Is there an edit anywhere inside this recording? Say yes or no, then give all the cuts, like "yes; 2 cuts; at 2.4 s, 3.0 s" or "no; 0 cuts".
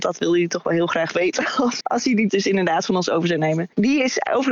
yes; 2 cuts; at 1.8 s, 2.3 s